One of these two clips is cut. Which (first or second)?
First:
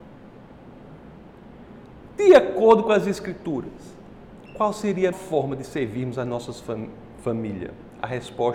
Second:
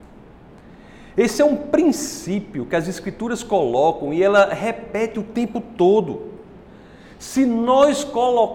first